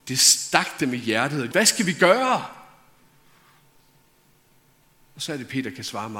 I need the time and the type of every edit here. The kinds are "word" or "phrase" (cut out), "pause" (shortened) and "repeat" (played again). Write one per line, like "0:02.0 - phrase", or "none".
0:01.5 - word